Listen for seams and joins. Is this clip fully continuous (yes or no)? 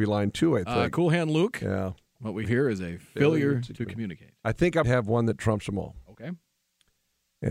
no